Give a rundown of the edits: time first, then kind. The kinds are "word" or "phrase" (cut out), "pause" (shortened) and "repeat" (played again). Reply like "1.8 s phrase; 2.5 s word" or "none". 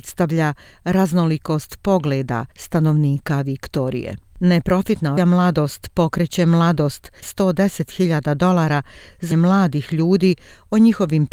2.5 s pause; 5.2 s word; 7.2 s phrase; 9.3 s word